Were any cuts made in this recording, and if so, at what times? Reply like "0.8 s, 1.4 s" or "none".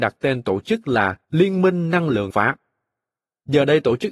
1.2 s, 2.3 s